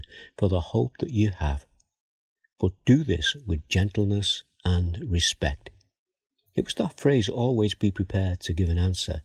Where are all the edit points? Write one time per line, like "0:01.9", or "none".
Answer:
none